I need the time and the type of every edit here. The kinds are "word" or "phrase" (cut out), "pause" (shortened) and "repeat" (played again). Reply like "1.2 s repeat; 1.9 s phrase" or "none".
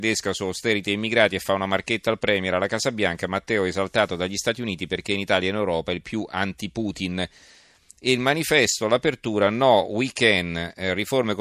none